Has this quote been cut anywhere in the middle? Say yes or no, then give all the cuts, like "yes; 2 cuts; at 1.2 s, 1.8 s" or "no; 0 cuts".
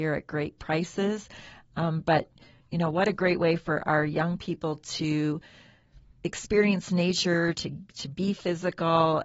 no; 0 cuts